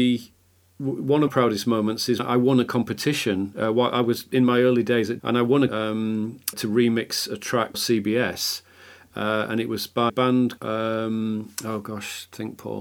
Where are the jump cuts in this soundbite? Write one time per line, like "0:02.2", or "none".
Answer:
0:01.3
0:02.2
0:05.2
0:05.7
0:06.5
0:07.7
0:10.1
0:10.6